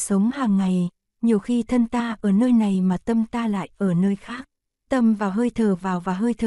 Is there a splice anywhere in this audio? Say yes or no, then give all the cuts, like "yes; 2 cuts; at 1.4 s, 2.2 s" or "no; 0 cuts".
yes; 1 cut; at 4.9 s